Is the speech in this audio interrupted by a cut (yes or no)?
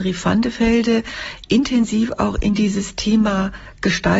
no